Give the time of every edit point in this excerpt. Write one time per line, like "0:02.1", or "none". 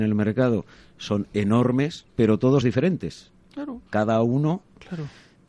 0:02.1
0:02.6
0:03.9